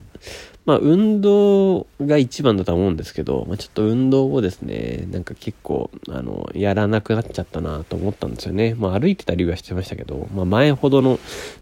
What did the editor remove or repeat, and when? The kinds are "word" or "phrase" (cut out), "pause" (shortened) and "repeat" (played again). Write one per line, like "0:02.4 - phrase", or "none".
0:01.9 - pause